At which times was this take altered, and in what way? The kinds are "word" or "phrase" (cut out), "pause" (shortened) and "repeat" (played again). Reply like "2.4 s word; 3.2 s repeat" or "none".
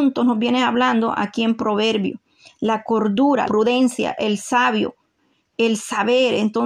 3.5 s word